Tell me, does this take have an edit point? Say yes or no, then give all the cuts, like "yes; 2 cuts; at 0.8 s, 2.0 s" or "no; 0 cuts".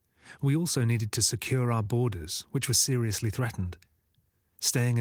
no; 0 cuts